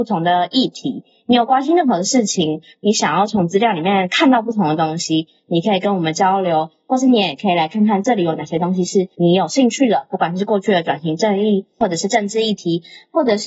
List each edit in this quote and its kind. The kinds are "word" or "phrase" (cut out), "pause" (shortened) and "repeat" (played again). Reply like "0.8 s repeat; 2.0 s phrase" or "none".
9.1 s pause